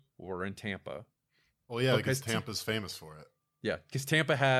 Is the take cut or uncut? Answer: uncut